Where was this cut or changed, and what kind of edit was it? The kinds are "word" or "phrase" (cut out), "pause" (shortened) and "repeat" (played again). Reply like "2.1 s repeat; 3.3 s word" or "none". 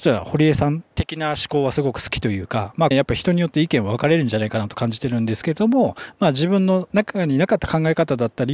2.9 s phrase